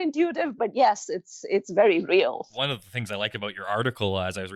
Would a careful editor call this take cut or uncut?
uncut